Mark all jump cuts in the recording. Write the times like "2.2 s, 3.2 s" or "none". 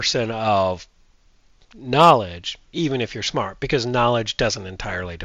2.7 s